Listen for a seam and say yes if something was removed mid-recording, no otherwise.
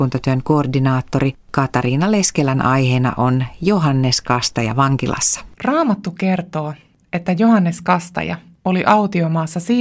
yes